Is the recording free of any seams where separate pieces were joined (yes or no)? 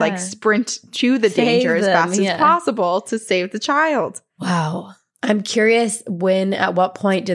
yes